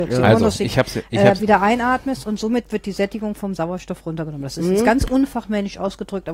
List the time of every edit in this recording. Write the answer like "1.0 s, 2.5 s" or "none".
none